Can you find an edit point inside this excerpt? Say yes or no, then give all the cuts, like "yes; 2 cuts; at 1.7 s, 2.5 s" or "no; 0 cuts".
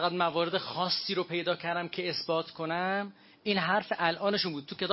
no; 0 cuts